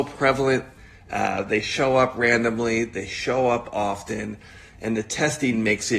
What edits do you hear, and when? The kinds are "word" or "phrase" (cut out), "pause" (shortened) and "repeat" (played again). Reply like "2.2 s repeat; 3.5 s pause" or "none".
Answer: none

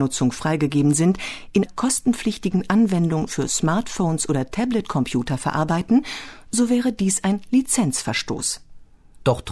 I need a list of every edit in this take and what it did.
1.7 s word

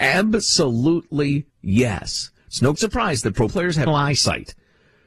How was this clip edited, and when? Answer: 1.5 s pause; 2.8 s word; 3.5 s word; 3.9 s word

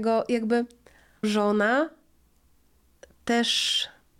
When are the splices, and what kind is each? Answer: 1.2 s word

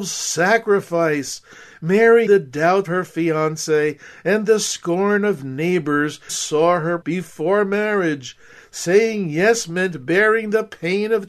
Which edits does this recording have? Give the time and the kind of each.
2.3 s word; 2.8 s word; 6.3 s word; 7.0 s word

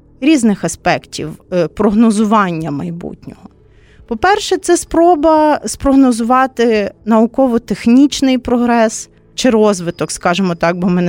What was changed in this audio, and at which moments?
none

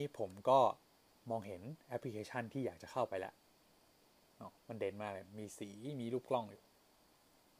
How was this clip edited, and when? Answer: 4.6 s pause

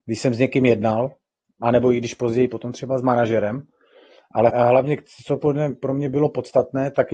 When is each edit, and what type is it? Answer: 4.5 s word

